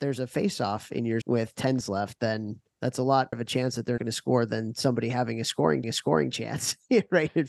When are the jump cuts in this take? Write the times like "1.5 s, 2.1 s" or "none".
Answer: 1.2 s, 1.8 s, 2.7 s, 3.3 s, 4.0 s, 5.8 s